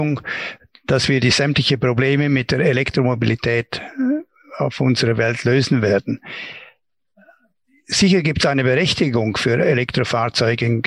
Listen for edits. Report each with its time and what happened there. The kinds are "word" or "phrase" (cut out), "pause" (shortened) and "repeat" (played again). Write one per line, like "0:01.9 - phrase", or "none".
none